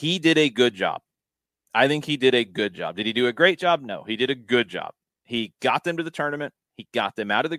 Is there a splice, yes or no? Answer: no